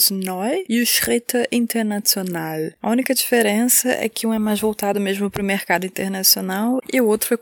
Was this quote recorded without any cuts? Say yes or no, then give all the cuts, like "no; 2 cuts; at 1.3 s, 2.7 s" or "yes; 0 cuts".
yes; 0 cuts